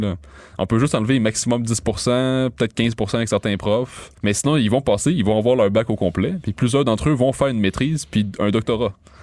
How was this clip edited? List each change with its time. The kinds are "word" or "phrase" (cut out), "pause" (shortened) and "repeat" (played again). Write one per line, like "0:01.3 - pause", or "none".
0:04.2 - pause